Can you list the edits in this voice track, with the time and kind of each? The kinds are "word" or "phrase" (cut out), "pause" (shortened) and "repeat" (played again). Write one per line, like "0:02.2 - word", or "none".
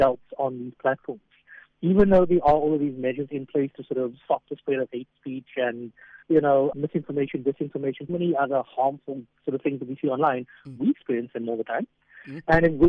0:06.2 - pause
0:06.7 - word
0:08.1 - word